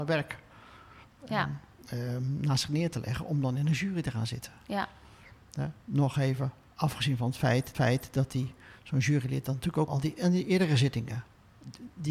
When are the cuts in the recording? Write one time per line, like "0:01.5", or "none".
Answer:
0:07.7
0:09.9